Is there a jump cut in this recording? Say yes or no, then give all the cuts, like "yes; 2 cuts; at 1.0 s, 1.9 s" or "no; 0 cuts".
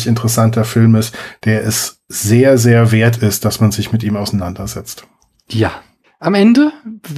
no; 0 cuts